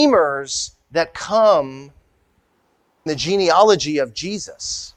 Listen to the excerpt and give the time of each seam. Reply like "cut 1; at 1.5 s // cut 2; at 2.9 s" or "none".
cut 1; at 3.1 s